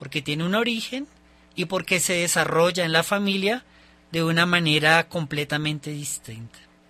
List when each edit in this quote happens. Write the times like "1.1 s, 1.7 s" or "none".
none